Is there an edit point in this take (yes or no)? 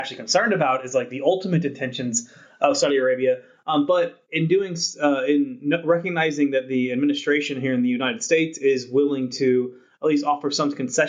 no